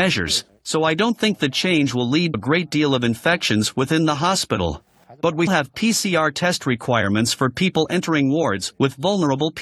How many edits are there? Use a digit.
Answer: 2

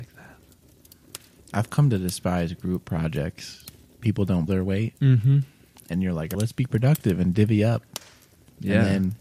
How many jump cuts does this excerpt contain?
4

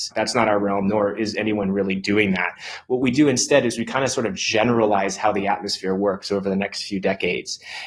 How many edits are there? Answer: 0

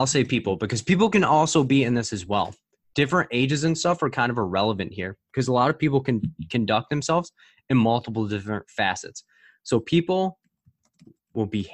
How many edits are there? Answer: 0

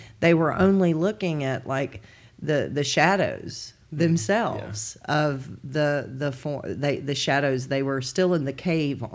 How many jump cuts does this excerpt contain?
0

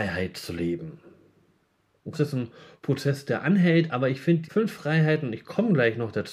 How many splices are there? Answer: 2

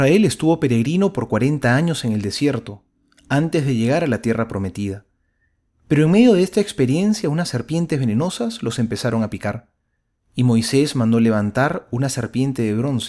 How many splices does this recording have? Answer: 0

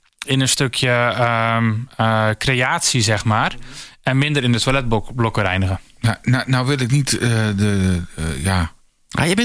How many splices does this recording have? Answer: 0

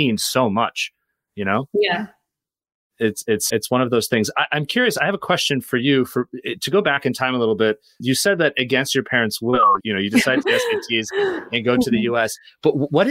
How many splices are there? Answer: 4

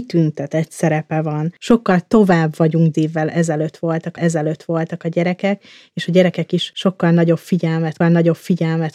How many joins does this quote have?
3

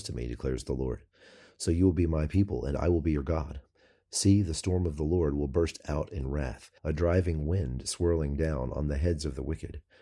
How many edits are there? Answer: 1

